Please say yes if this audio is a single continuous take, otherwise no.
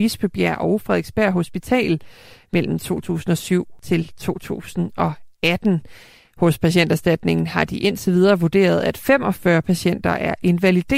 yes